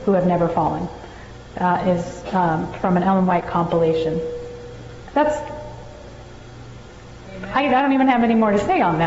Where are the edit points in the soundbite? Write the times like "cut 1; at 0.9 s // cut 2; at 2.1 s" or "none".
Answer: none